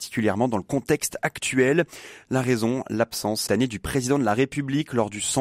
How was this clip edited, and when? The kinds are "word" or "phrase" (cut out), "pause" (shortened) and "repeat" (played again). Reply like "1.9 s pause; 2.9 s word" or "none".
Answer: 3.5 s word